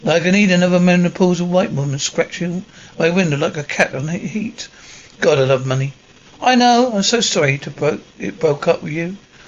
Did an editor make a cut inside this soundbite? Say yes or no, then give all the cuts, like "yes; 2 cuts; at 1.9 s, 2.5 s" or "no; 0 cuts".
no; 0 cuts